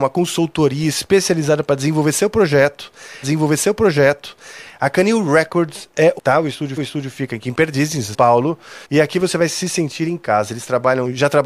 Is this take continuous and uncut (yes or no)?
no